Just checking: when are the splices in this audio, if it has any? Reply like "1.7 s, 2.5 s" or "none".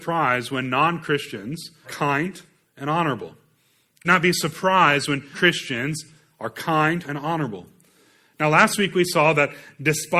1.8 s, 2.6 s, 4.0 s, 5.3 s, 7.0 s